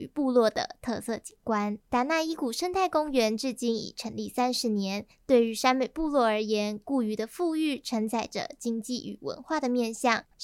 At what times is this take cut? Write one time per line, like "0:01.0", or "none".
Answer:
0:01.8